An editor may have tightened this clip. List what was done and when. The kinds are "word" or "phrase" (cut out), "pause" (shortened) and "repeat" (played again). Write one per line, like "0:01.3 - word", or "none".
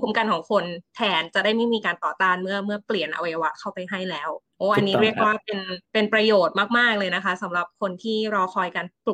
0:04.5 - pause
0:05.9 - pause